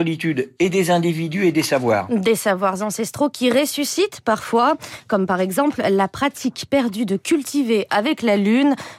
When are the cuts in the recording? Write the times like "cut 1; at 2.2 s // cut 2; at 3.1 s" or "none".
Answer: none